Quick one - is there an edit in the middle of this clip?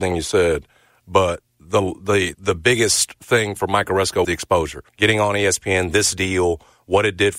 yes; 4 cuts; at 1.5 s, 2.3 s, 4.2 s, 4.9 s

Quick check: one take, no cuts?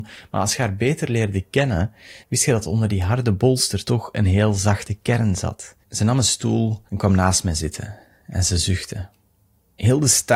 no; 3 cuts; at 2.2 s, 5.8 s, 6.9 s

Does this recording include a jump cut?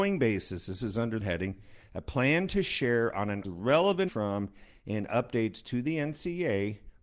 yes; 3 cuts; at 1.2 s, 3.4 s, 4.1 s

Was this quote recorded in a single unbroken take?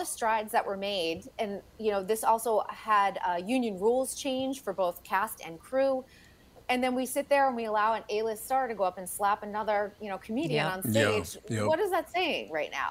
yes; 0 cuts

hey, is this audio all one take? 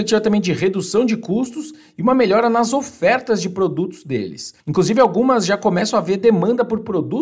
no; 1 cut; at 4.6 s

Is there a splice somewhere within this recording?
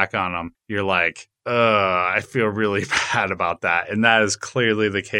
no; 0 cuts

